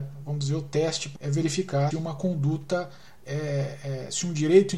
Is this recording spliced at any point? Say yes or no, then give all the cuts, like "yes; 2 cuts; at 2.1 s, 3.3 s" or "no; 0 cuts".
yes; 2 cuts; at 1.2 s, 1.9 s